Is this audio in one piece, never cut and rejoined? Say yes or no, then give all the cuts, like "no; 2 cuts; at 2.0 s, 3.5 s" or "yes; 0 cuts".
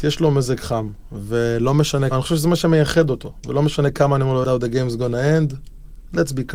no; 2 cuts; at 2.1 s, 4.4 s